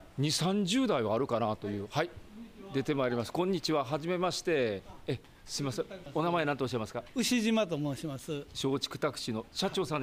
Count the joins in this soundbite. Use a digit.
0